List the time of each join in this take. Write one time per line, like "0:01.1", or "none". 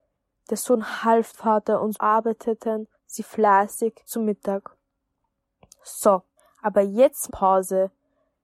0:01.3
0:01.9
0:03.0
0:04.1
0:06.4
0:07.3